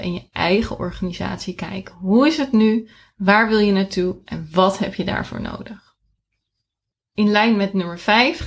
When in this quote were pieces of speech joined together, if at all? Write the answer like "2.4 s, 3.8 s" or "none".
none